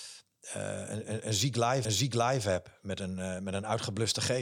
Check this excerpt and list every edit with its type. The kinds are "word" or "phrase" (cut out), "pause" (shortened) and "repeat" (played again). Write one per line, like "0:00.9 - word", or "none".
0:01.8 - repeat